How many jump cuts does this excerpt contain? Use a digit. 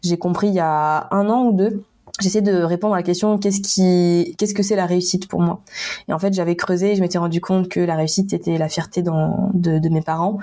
0